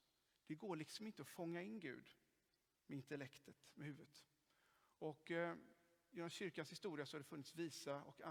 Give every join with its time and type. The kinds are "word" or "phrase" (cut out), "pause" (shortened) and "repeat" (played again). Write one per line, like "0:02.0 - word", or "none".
none

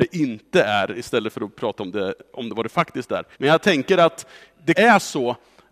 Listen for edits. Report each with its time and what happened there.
0:03.3 - pause
0:04.7 - word

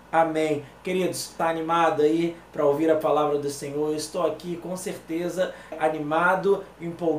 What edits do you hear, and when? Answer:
0:01.4 - phrase
0:05.7 - word

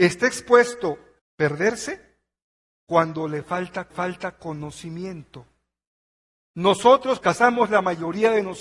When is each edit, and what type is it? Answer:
0:01.2 - word
0:03.9 - repeat
0:07.2 - phrase

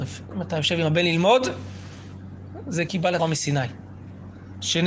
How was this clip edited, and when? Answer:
0:02.9 - word
0:03.2 - word

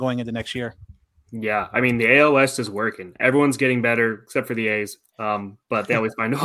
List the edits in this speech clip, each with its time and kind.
none

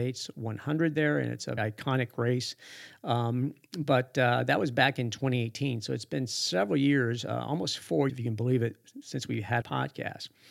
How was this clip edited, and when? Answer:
0:01.6 - word
0:08.1 - word
0:09.6 - phrase

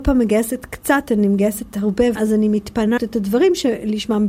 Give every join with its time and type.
0:02.2 - word
0:03.0 - word

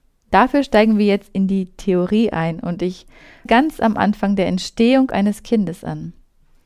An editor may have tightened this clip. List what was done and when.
0:03.5 - word

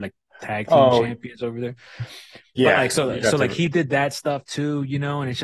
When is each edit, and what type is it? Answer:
none

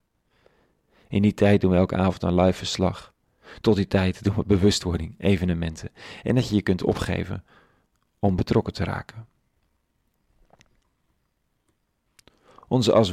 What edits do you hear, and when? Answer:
none

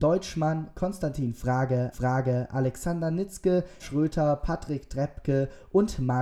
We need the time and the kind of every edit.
0:01.9 - repeat
0:03.8 - word

